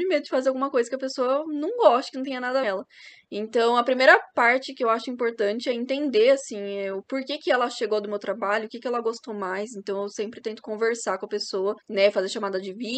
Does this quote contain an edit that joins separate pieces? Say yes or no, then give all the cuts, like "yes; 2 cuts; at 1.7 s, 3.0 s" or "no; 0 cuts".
yes; 2 cuts; at 2.6 s, 11.8 s